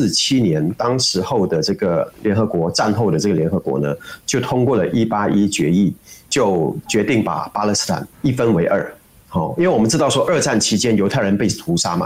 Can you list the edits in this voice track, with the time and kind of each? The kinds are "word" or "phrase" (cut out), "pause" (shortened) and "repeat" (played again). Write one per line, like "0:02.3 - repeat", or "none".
0:08.1 - pause

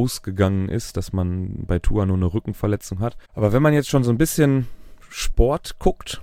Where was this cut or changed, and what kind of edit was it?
0:03.2 - pause

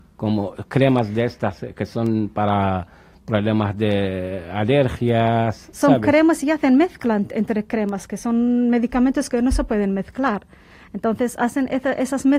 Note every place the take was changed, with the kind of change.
none

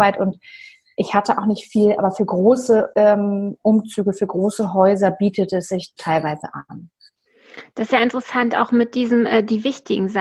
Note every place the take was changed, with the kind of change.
0:06.0 - word

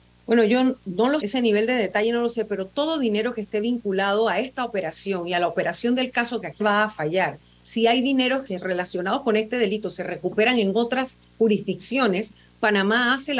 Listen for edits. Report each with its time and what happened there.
0:01.2 - word
0:06.6 - word

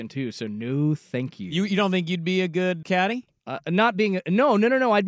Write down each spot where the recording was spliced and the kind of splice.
0:02.8 - word

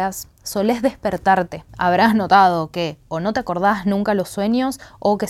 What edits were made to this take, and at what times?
0:01.7 - pause

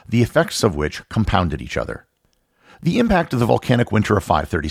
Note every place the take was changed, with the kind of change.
none

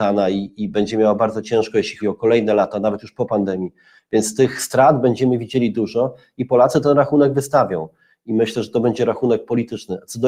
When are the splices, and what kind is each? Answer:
0:02.0 - word

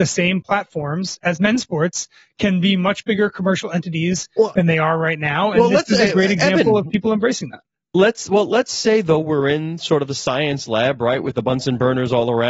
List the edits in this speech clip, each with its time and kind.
none

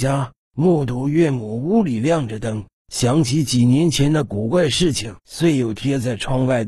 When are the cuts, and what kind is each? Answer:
0:05.2 - pause

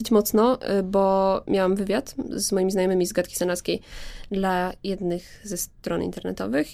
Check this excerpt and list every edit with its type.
none

